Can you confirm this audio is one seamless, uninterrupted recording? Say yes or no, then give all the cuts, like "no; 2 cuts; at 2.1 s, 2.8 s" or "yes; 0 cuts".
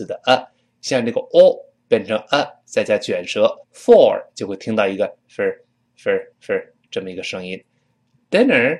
no; 3 cuts; at 3.6 s, 5.2 s, 6.3 s